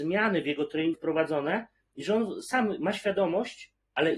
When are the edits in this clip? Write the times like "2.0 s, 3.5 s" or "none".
0.9 s